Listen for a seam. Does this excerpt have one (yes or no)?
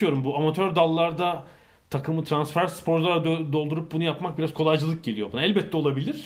no